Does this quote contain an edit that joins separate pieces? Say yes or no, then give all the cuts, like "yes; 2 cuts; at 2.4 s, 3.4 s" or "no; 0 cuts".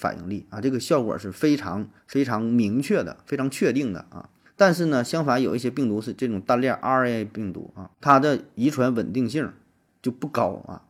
yes; 3 cuts; at 2.0 s, 4.5 s, 7.9 s